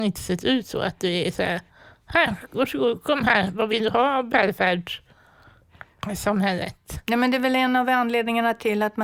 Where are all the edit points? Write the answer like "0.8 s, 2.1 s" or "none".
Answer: none